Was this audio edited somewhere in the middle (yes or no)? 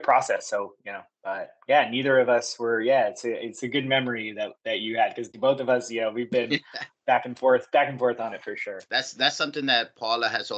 yes